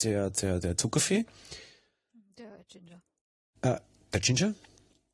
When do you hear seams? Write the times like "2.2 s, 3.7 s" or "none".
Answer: none